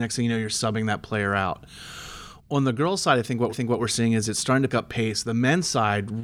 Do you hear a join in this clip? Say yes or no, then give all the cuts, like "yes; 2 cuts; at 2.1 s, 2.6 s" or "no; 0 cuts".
yes; 2 cuts; at 3.5 s, 4.7 s